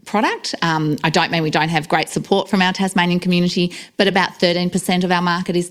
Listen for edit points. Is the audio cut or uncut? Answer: uncut